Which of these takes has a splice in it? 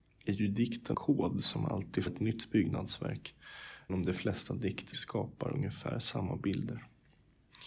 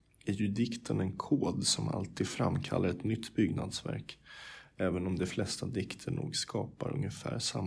first; 4 cuts; at 0.9 s, 2.1 s, 3.9 s, 4.9 s

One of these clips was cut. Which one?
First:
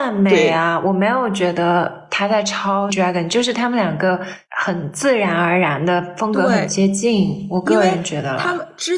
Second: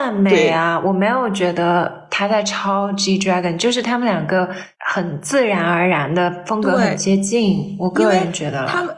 first; 1 cut; at 2.9 s

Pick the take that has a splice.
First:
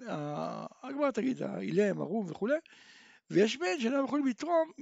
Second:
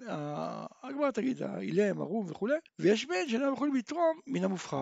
second; 1 cut; at 2.7 s

